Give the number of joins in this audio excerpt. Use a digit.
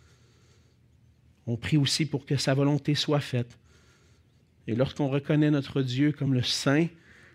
0